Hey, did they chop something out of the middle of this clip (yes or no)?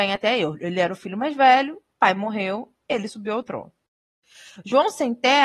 no